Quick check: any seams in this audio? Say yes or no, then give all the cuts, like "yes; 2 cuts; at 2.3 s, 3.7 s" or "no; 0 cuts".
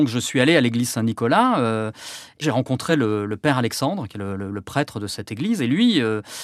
no; 0 cuts